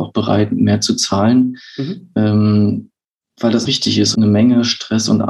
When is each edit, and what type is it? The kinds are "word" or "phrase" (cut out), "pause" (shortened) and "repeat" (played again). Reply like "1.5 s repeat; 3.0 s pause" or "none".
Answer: 3.6 s word; 4.1 s word